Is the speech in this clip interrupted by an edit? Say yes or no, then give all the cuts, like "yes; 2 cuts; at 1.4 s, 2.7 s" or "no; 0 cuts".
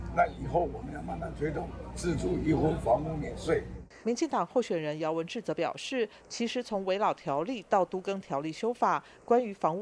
yes; 1 cut; at 4.0 s